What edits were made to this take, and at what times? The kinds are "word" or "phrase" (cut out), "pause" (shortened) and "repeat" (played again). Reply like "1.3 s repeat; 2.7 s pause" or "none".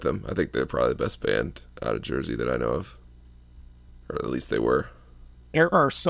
3.9 s pause